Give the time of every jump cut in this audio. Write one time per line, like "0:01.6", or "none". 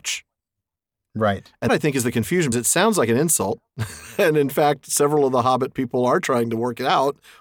0:01.7
0:02.5